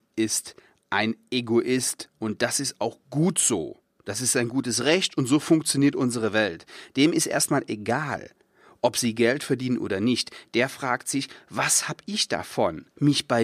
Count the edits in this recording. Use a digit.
0